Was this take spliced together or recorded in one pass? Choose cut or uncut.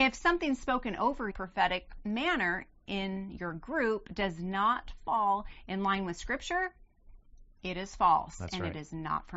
cut